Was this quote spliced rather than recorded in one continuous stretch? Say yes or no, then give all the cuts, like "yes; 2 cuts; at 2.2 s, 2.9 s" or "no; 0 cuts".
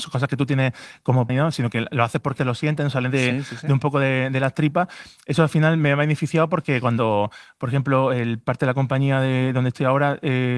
yes; 2 cuts; at 1.3 s, 2.4 s